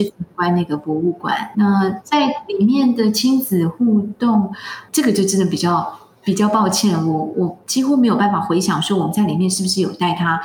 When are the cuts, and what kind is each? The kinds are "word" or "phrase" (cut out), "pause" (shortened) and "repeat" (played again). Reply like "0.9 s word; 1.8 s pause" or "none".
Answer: 1.5 s word; 4.9 s word

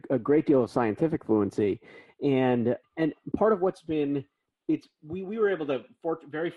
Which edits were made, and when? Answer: 2.8 s word; 4.6 s phrase

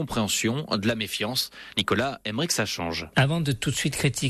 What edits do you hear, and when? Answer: none

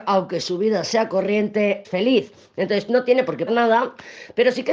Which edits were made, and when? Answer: 1.8 s word; 3.5 s word

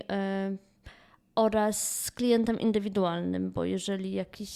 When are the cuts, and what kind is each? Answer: none

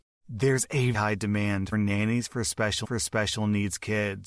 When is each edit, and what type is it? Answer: 0.9 s word; 1.7 s word; 2.8 s repeat

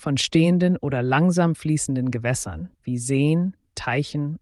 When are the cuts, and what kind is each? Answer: 2.7 s pause

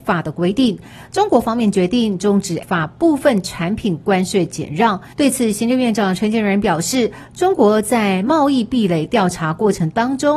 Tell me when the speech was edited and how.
2.6 s word; 5.1 s pause

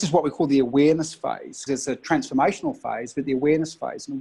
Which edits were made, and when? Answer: 1.7 s word

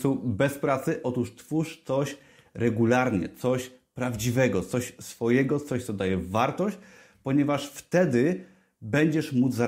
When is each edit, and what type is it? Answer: none

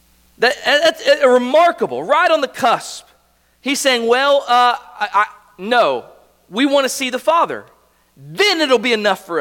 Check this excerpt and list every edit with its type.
none

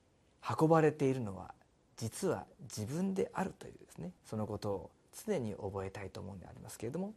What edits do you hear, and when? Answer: 4.2 s pause

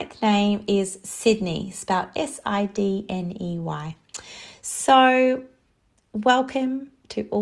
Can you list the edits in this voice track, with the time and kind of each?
none

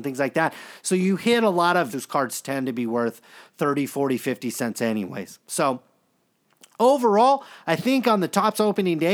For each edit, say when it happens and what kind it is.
1.9 s phrase

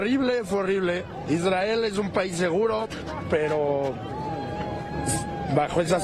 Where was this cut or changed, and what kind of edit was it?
none

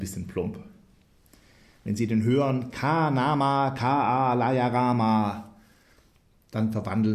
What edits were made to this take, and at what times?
none

